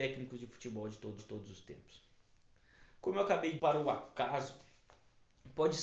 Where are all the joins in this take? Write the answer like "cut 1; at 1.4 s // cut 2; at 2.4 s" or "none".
cut 1; at 1.2 s // cut 2; at 3.6 s